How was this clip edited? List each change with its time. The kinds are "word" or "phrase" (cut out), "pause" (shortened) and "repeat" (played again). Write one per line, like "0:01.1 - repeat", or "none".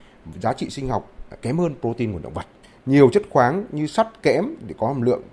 none